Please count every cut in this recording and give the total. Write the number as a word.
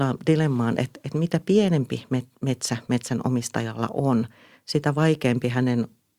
zero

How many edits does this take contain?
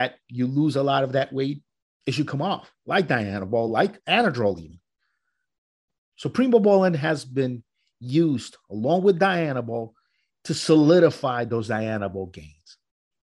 zero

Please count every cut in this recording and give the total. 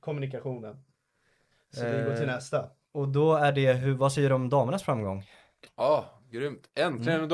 zero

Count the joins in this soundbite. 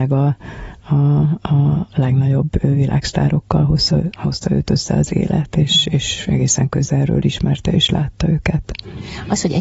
zero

